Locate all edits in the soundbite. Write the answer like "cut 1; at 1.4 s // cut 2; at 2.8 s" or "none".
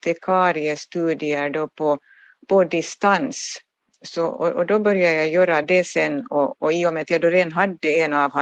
none